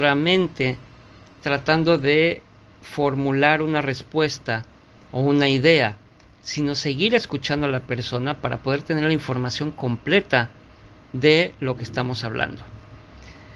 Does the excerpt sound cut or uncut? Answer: uncut